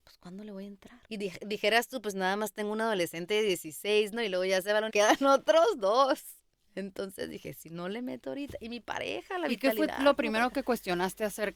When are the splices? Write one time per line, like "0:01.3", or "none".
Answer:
0:01.0
0:04.9
0:06.5